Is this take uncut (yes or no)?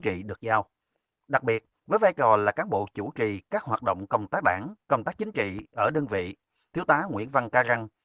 yes